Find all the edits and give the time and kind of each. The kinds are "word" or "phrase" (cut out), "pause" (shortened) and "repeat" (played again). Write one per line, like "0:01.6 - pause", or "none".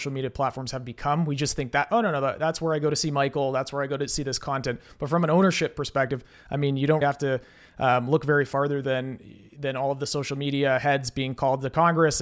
0:07.0 - word